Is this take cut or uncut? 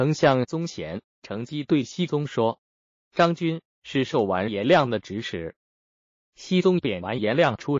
cut